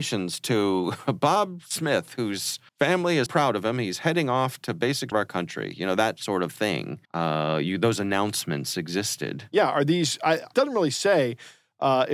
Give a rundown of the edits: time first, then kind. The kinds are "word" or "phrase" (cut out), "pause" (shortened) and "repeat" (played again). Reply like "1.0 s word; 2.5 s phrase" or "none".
2.7 s pause; 3.3 s word; 5.1 s phrase; 7.0 s pause; 10.5 s word